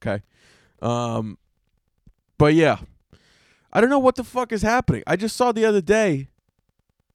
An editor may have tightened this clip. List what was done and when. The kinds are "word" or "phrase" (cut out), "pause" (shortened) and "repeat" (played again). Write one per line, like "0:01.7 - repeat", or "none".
none